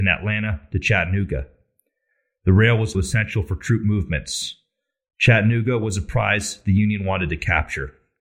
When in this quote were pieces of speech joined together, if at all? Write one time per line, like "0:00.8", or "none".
0:02.9